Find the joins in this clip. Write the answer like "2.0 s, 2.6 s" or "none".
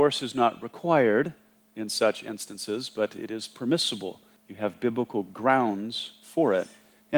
none